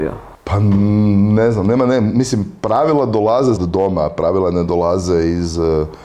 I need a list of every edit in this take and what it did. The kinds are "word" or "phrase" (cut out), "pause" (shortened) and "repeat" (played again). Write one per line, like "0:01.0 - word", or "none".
0:03.6 - word